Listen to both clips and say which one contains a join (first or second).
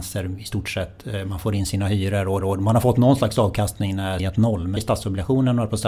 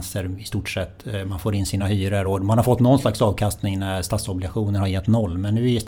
first